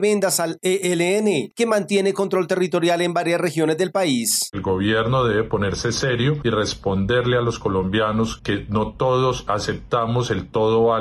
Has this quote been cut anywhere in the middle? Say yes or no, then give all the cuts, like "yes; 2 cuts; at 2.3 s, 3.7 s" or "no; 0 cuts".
no; 0 cuts